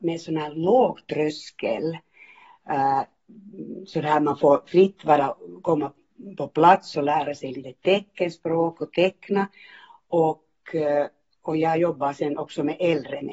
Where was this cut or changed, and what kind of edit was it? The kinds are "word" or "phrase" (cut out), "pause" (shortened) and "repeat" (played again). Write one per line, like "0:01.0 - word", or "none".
none